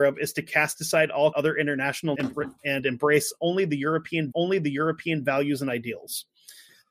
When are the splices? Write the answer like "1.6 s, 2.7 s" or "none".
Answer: 1.3 s, 2.1 s, 4.3 s